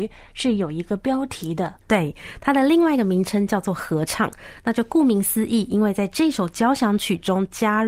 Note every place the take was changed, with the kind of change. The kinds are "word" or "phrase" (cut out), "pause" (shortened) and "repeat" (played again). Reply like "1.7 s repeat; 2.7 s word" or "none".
1.8 s pause

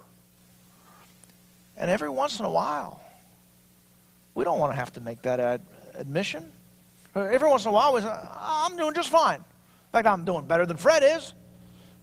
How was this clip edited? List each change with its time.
none

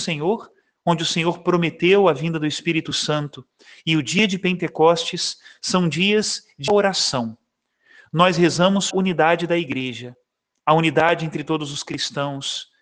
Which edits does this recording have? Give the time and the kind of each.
6.7 s word; 8.9 s word

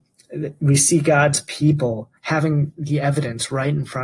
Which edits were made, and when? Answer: 2.2 s pause

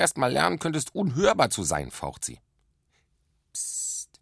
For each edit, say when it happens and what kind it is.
none

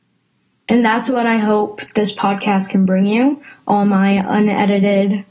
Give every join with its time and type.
none

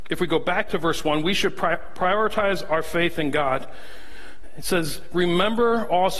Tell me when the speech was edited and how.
none

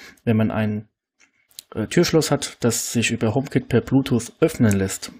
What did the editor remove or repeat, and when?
none

